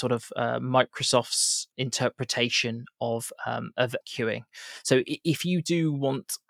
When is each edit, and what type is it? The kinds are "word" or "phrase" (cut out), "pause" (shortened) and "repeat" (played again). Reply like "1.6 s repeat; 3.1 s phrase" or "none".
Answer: 1.7 s word; 4.0 s word